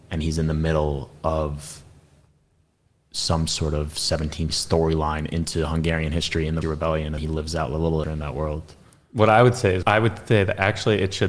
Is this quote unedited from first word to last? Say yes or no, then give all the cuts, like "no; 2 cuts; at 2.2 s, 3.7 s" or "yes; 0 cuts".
no; 5 cuts; at 4.5 s, 6.6 s, 7.2 s, 8.0 s, 9.8 s